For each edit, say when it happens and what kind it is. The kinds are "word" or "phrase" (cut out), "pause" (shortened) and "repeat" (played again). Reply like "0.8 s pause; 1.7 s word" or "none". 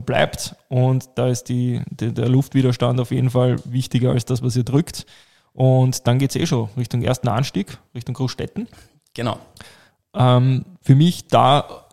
none